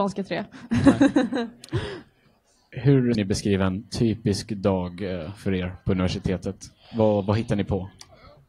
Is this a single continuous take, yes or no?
no